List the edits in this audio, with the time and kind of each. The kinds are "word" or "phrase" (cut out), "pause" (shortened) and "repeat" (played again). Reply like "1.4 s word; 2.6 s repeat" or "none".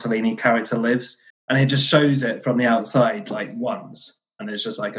1.3 s pause